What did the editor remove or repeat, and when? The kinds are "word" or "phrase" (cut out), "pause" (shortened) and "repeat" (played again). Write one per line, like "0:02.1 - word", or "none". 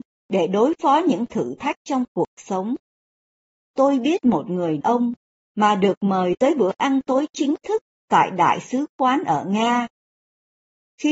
0:04.8 - word